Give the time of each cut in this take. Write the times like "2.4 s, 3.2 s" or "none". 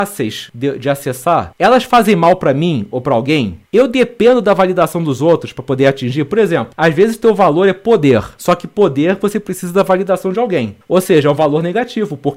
none